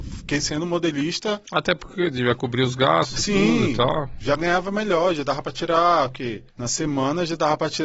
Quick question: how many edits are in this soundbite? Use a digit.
2